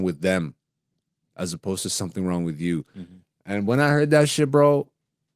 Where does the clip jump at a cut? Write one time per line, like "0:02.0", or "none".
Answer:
none